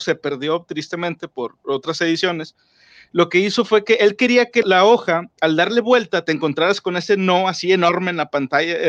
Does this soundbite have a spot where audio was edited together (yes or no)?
yes